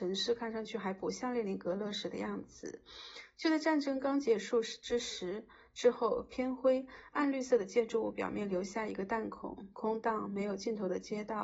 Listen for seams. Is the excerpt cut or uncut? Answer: uncut